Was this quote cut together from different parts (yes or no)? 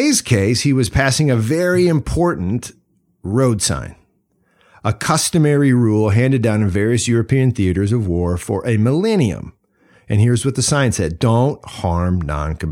no